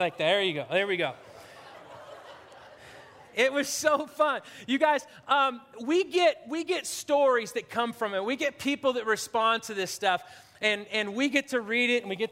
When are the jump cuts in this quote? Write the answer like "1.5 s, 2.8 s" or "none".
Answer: none